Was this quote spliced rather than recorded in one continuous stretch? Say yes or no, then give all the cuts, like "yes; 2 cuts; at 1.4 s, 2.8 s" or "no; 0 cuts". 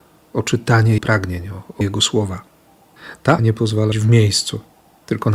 yes; 4 cuts; at 1.0 s, 1.8 s, 3.4 s, 3.9 s